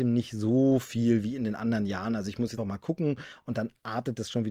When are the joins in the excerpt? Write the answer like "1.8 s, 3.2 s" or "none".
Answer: 2.6 s